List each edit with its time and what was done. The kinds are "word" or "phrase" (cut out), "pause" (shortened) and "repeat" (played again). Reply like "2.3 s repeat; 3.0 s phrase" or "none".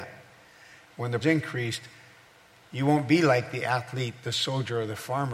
1.2 s phrase

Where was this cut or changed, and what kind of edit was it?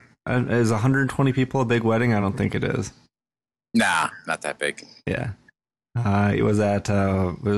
none

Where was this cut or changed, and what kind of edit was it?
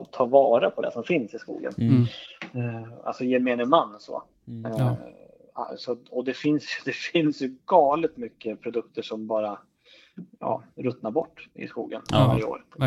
none

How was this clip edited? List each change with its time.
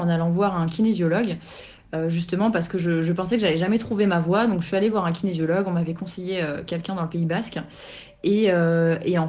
none

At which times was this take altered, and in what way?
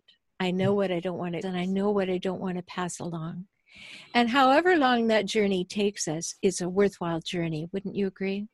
1.4 s word

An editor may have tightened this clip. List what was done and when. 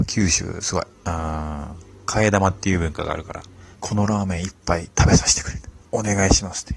0.9 s pause; 3.7 s pause; 5.8 s pause

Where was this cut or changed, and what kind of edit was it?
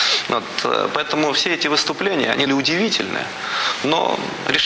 2.5 s phrase

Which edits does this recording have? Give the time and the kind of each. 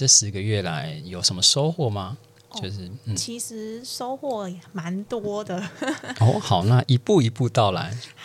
none

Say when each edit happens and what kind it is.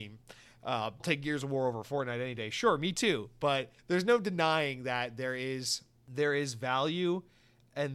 1.0 s word; 3.8 s pause

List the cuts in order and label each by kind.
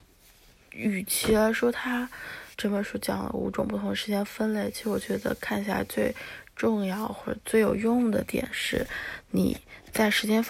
2.5 s pause

